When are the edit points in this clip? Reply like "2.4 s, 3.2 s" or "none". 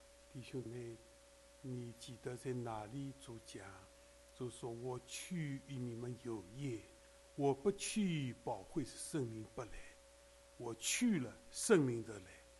none